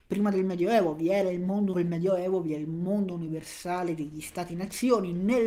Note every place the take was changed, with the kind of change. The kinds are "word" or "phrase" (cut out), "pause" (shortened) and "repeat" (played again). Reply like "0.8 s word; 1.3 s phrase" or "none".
1.7 s phrase